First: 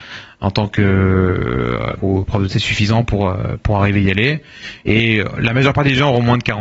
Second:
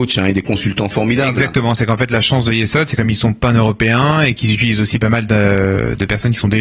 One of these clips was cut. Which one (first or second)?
first